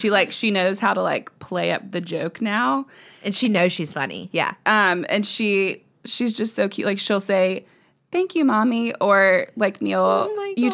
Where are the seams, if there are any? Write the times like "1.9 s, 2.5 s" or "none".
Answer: 4.3 s